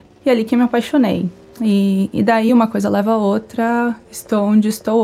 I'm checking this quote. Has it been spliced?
no; 0 cuts

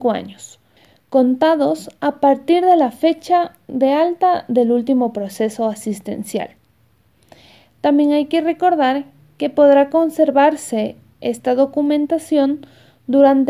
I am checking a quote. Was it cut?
no; 0 cuts

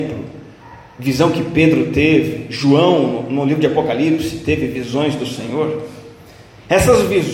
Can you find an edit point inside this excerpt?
no; 0 cuts

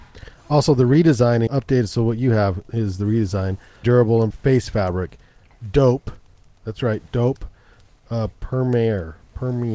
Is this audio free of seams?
no; 4 cuts; at 1.5 s, 3.8 s, 4.3 s, 8.3 s

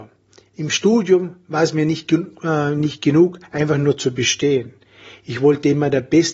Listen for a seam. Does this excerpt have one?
no; 0 cuts

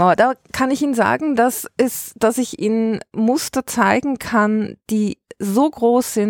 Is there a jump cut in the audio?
no; 0 cuts

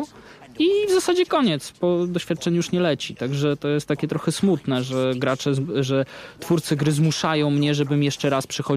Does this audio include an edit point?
no; 0 cuts

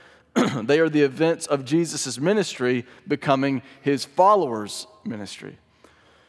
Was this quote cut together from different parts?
no; 0 cuts

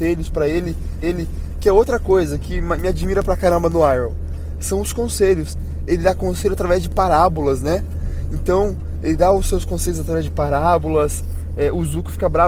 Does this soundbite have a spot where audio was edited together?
yes; 1 cut; at 1.0 s

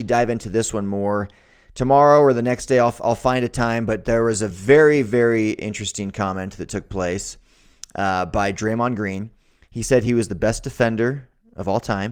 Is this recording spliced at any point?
no; 0 cuts

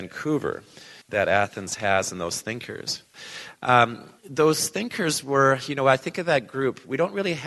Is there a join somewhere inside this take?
yes; 2 cuts; at 1.0 s, 4.2 s

